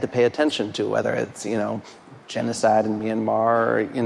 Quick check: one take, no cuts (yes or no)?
yes